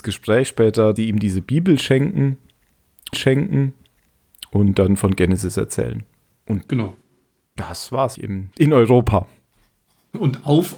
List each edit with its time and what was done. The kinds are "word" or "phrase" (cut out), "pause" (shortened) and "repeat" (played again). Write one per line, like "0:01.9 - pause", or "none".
0:01.0 - word
0:03.1 - repeat
0:06.3 - pause
0:08.1 - word
0:08.5 - pause